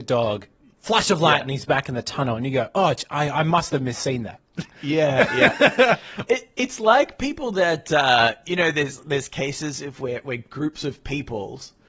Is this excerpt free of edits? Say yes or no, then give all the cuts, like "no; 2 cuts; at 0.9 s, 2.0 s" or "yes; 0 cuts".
no; 2 cuts; at 4.7 s, 6.5 s